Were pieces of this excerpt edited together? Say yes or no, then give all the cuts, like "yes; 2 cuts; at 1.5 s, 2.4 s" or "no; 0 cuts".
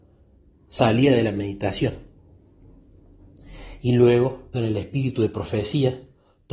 yes; 1 cut; at 4.5 s